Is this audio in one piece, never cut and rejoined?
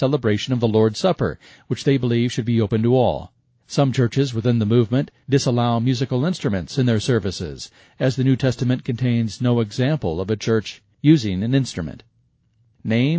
yes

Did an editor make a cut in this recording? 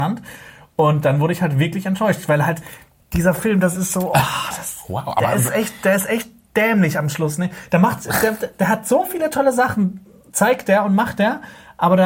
no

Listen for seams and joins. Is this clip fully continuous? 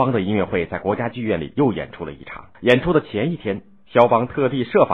no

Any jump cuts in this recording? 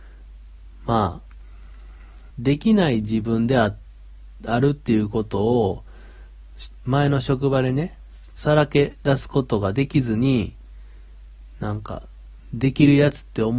yes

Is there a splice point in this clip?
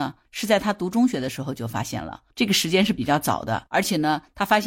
yes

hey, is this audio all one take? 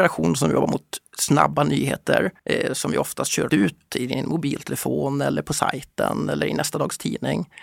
no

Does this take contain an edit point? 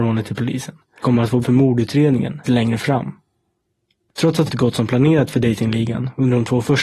yes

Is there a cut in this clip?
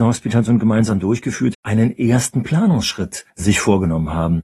yes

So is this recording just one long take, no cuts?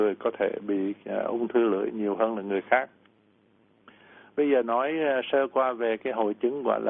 yes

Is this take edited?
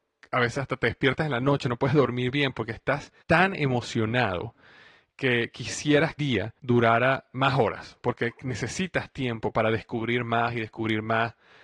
yes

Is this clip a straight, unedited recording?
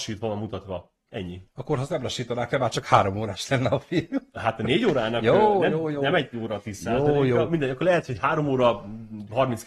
yes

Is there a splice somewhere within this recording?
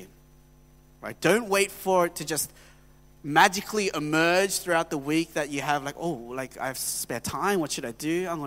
no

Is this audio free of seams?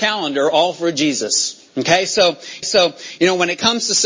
no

